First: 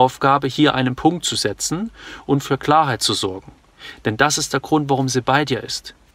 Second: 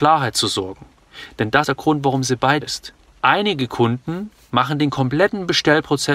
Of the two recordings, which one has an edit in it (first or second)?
second